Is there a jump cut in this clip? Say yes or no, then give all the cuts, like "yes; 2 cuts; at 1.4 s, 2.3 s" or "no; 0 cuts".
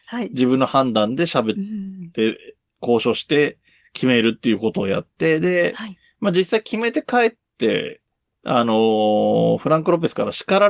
no; 0 cuts